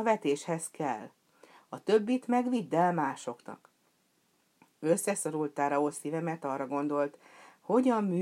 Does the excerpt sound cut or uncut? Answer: uncut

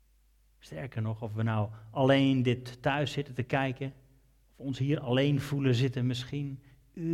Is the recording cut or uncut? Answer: uncut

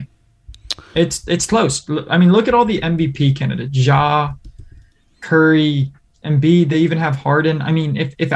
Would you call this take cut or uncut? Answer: uncut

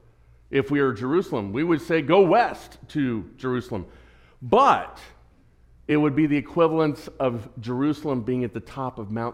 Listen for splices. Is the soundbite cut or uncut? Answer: uncut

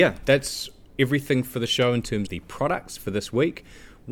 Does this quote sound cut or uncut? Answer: cut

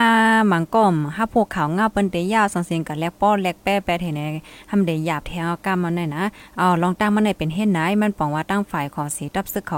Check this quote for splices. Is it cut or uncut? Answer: uncut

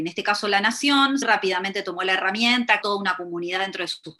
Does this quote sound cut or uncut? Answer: cut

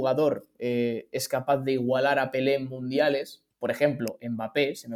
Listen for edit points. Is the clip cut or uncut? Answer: cut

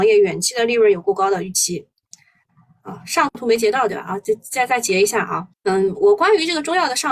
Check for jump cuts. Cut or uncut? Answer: cut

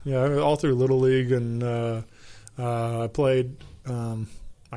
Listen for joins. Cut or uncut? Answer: uncut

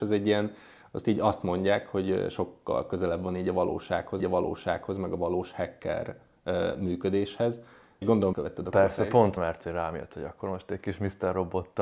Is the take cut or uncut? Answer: cut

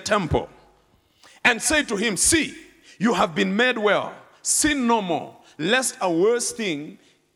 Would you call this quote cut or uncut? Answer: uncut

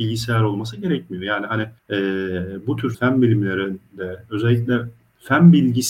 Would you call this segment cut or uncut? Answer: cut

